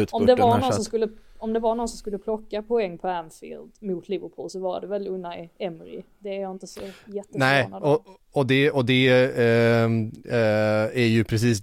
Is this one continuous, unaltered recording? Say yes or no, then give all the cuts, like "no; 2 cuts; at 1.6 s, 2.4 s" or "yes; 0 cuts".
yes; 0 cuts